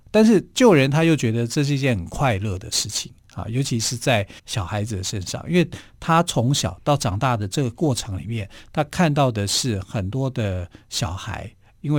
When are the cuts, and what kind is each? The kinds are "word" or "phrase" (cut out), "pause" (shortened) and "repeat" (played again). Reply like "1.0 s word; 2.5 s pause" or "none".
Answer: 4.4 s pause